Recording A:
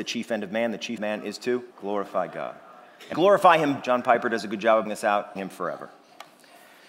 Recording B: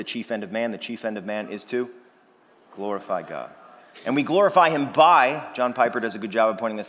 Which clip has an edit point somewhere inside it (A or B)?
A